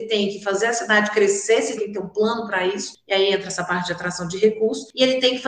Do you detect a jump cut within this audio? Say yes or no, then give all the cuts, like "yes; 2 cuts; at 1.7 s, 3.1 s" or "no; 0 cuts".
yes; 1 cut; at 1.8 s